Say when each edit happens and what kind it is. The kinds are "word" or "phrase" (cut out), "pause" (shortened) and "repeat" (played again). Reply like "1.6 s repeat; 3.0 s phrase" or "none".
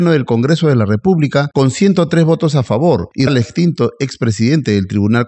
3.3 s word